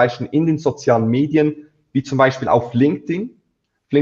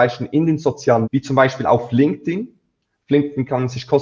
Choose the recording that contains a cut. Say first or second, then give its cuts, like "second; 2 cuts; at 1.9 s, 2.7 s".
second; 1 cut; at 1.0 s